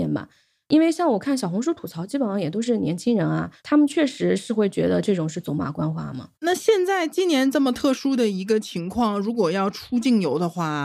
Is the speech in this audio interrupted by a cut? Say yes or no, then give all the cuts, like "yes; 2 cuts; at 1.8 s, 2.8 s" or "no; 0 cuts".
yes; 2 cuts; at 3.6 s, 6.3 s